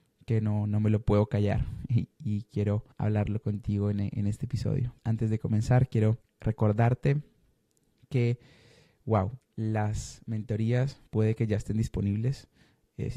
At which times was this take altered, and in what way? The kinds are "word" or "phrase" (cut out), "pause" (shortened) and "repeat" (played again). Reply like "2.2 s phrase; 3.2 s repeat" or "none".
2.9 s pause; 5.0 s pause; 6.2 s pause; 9.4 s pause; 11.1 s pause

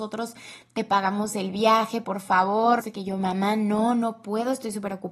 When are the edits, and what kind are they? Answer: 2.0 s word; 2.8 s word

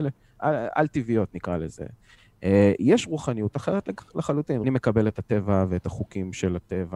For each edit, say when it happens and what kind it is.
4.6 s phrase

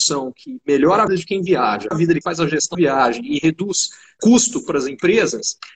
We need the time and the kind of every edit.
1.1 s word; 1.9 s word; 2.2 s word; 2.7 s word; 4.2 s word

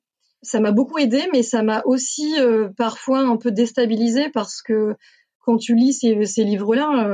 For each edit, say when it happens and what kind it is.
none

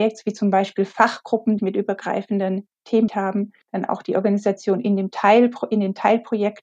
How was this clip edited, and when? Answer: 1.6 s phrase; 3.1 s word; 3.6 s pause

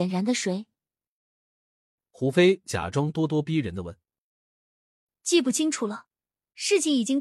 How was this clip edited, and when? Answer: none

